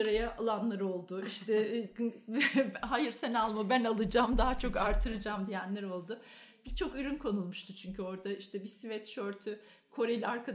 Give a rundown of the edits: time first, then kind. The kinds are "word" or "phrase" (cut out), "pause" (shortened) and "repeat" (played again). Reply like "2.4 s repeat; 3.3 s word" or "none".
none